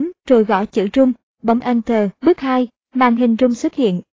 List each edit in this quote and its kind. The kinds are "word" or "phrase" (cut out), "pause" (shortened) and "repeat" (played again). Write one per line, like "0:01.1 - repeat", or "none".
0:02.1 - pause